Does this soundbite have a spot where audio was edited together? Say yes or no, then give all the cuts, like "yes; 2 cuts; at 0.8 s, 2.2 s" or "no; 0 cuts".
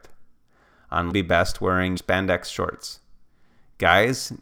yes; 2 cuts; at 1.1 s, 2.0 s